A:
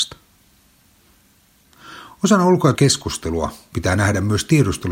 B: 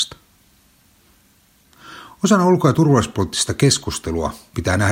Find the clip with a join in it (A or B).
A